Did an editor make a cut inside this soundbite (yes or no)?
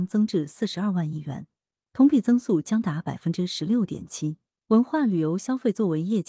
no